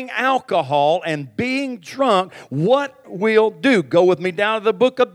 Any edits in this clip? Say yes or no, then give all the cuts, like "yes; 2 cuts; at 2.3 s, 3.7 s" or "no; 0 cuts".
yes; 1 cut; at 3.0 s